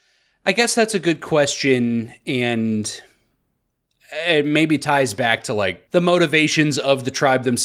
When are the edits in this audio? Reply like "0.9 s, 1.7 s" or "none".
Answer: 5.9 s